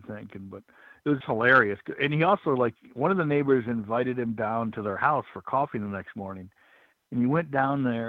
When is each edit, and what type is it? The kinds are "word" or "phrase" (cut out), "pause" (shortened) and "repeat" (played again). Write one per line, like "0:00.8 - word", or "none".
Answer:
0:01.2 - word

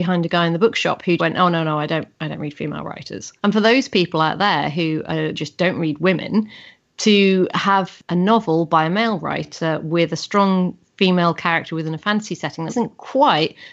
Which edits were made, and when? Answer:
0:01.2 - word
0:03.4 - pause
0:05.3 - phrase
0:12.7 - word

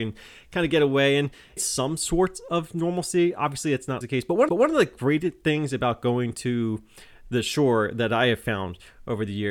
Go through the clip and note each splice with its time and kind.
0:01.6 - word
0:04.0 - word
0:04.5 - repeat

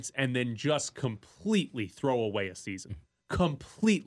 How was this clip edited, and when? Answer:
0:03.0 - pause

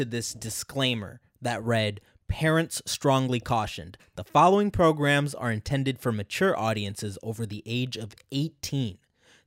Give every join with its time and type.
none

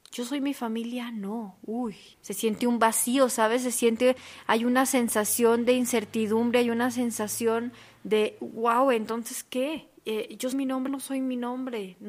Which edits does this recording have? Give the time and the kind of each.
0:02.1 - pause
0:10.0 - pause
0:10.5 - word
0:10.9 - word

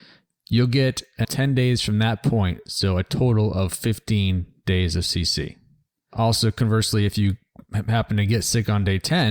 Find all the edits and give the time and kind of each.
0:01.2 - word

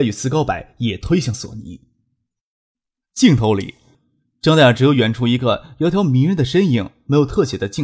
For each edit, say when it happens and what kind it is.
none

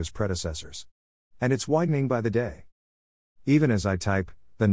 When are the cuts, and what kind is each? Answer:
none

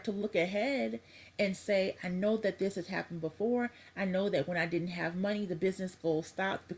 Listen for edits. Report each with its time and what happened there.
none

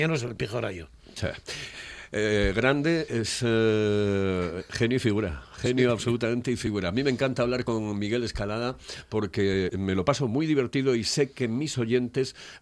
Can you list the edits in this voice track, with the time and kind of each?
0:03.1 - word

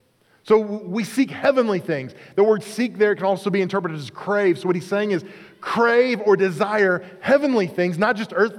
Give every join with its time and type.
none

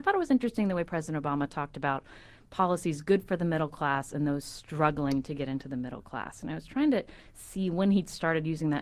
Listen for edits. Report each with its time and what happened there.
none

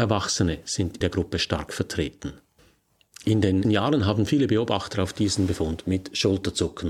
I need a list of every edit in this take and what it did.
0:01.0 - word
0:03.6 - word

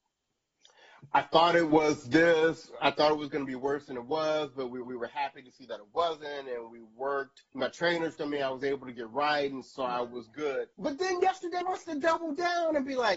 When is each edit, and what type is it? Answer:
0:04.8 - repeat
0:07.5 - pause
0:08.2 - word
0:10.7 - pause
0:11.6 - word

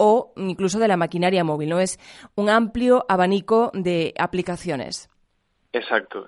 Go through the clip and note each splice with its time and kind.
none

